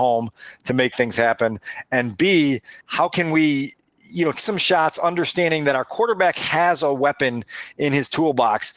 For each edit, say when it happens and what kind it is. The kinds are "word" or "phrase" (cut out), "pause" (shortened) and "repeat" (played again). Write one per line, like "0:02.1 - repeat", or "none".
0:02.8 - pause
0:04.3 - word

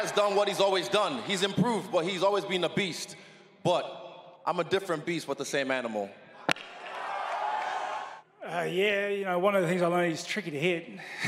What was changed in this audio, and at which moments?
0:04.4 - pause

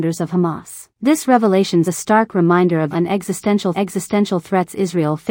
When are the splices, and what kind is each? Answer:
0:00.9 - pause
0:01.8 - phrase
0:02.9 - phrase
0:03.7 - repeat

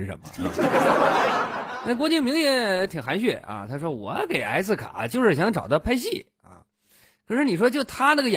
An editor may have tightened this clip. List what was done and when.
none

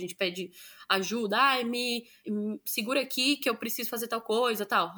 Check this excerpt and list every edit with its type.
0:02.2 - word

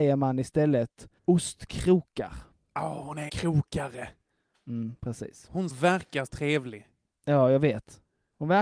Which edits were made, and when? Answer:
0:01.2 - pause
0:03.3 - word
0:05.7 - word
0:06.3 - word

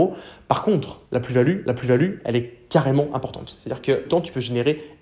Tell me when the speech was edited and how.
0:01.1 - pause
0:01.7 - repeat
0:04.1 - phrase

